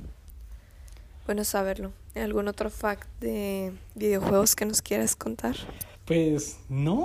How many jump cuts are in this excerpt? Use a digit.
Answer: 1